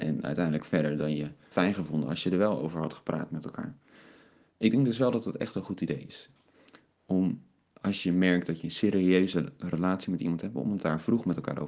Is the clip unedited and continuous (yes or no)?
no